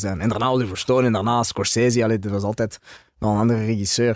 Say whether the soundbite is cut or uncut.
uncut